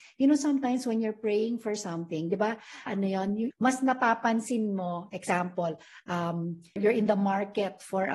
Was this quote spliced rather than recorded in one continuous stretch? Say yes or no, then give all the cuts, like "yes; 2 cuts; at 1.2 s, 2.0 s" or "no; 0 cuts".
yes; 3 cuts; at 2.9 s, 3.5 s, 6.8 s